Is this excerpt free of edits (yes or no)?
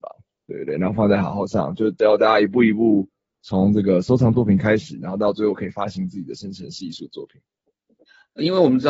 yes